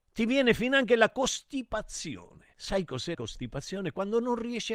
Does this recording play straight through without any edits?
no; 2 cuts; at 2.5 s, 3.1 s

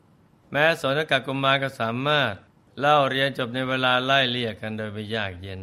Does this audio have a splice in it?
yes; 1 cut; at 2.5 s

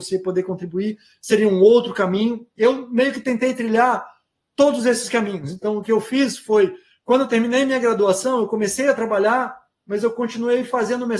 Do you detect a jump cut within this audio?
no; 0 cuts

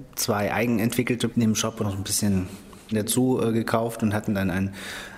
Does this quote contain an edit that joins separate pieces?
yes; 3 cuts; at 1.3 s, 1.8 s, 2.9 s

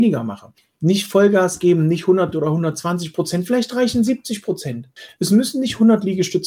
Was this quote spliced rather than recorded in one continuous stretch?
yes; 1 cut; at 2.3 s

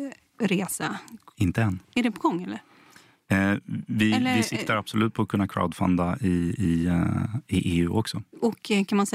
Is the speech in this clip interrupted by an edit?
yes; 1 cut; at 1.8 s

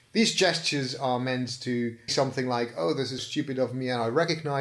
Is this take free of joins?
no; 2 cuts; at 2.1 s, 3.2 s

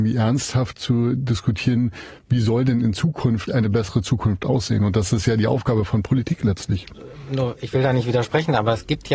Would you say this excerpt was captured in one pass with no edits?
no; 1 cut; at 3.5 s

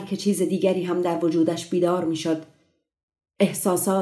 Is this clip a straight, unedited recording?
yes; 0 cuts

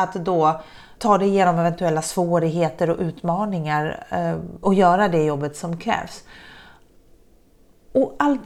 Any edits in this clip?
yes; 2 cuts; at 1.0 s, 4.6 s

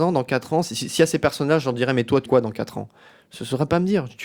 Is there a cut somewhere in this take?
yes; 1 cut; at 2.3 s

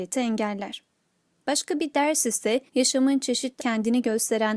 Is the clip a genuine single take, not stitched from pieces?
no; 2 cuts; at 2.7 s, 3.6 s

